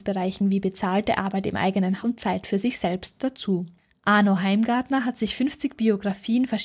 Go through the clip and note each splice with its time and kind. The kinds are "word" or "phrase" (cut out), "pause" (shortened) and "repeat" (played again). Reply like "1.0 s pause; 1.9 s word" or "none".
1.2 s word; 2.0 s word